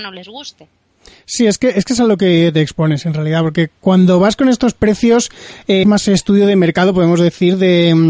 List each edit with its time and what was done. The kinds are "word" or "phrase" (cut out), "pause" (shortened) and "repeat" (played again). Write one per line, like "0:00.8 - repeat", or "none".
0:05.8 - word